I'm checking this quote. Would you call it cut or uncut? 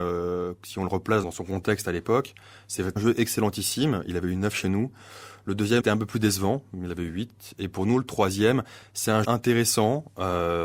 cut